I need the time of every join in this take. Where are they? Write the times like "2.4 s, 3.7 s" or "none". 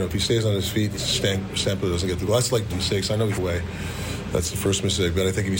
0.9 s, 2.7 s, 3.3 s